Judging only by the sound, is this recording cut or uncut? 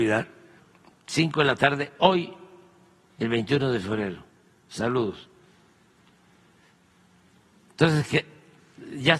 uncut